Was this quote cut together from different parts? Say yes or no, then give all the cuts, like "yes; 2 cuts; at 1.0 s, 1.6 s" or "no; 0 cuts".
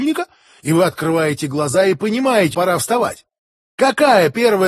yes; 1 cut; at 2.5 s